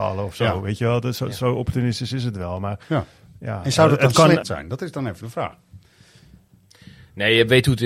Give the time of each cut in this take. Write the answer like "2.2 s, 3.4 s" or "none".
2.8 s, 4.4 s